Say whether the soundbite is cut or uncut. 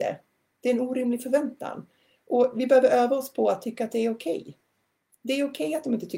uncut